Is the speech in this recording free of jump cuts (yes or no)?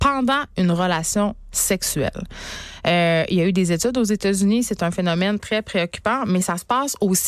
no